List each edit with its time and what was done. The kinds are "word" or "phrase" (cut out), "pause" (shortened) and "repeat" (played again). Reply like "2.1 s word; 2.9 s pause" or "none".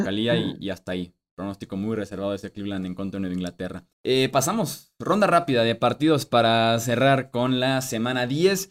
3.9 s pause